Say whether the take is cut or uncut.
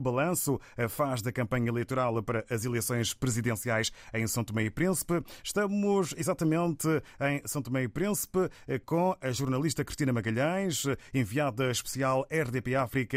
uncut